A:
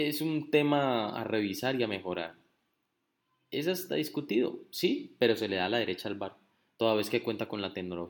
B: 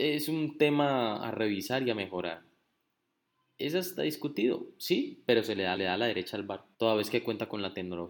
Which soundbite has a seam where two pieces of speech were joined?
B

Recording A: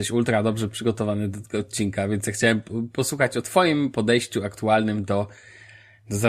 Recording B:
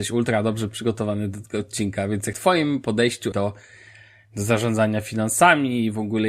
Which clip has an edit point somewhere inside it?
B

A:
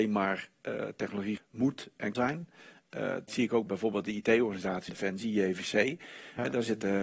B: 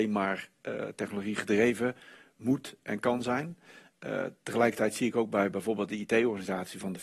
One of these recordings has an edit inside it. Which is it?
A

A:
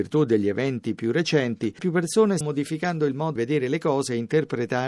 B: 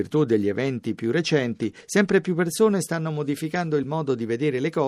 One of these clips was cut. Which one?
A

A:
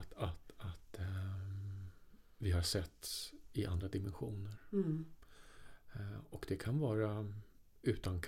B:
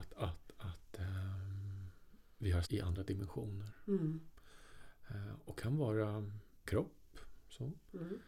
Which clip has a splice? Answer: B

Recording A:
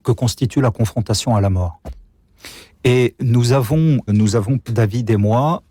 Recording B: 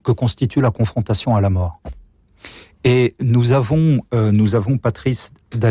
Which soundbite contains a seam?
A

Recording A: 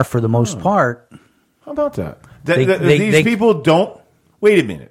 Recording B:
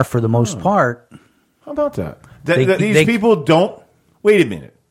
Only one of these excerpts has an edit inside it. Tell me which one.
B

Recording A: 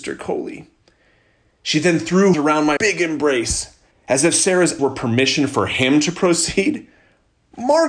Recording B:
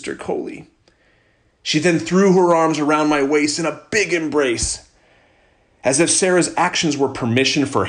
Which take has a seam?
A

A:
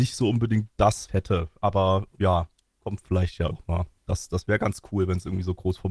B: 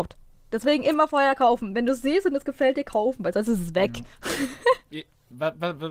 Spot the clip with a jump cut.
A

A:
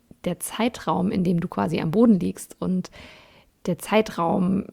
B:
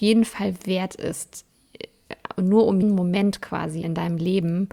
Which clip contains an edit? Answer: B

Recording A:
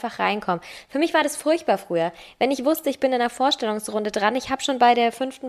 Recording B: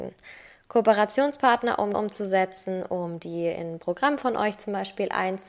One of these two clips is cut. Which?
B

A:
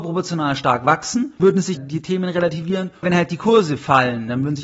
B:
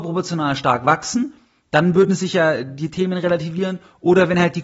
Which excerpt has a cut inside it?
A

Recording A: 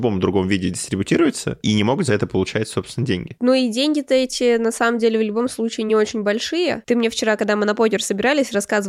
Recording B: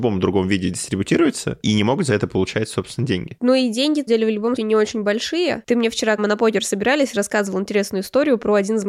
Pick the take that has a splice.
B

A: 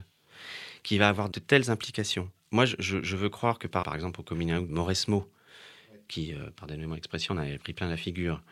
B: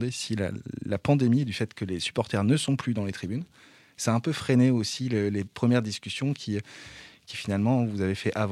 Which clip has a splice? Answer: A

